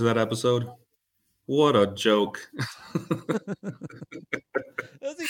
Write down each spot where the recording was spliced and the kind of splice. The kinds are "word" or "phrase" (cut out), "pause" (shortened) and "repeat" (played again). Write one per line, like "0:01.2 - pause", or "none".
none